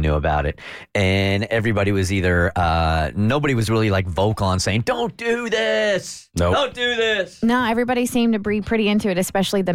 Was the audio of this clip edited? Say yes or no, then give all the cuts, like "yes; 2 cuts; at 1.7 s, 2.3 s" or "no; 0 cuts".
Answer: no; 0 cuts